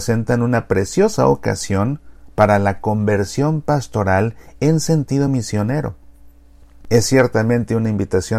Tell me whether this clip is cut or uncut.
uncut